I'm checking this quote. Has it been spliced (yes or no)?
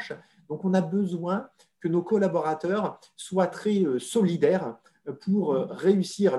no